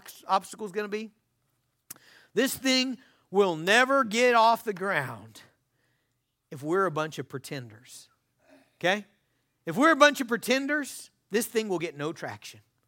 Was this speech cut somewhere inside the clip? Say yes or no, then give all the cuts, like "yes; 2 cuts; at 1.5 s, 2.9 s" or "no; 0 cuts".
no; 0 cuts